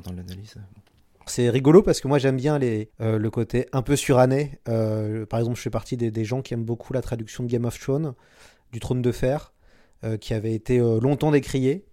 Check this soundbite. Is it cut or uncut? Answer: cut